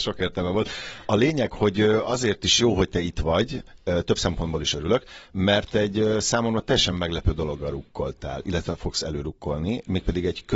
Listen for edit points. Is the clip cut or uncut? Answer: uncut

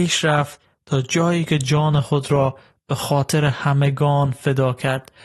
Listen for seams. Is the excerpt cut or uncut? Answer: uncut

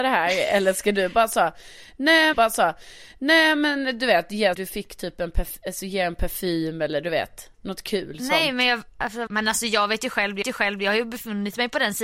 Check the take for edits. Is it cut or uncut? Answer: cut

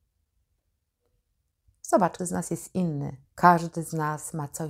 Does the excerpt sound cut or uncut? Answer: cut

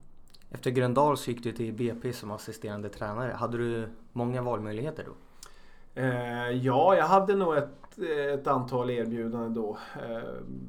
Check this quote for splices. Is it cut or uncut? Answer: uncut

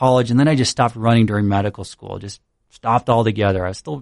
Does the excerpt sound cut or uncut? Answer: uncut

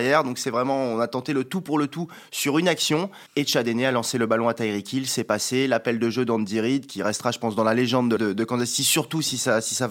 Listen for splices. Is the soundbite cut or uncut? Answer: cut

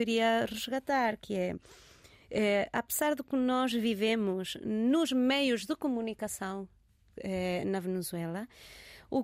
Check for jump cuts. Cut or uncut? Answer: uncut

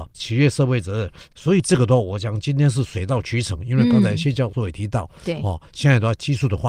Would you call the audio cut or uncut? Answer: uncut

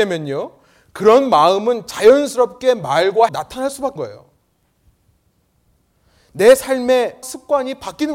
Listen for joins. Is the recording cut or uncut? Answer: cut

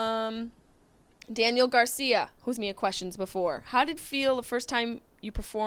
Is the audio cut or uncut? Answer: cut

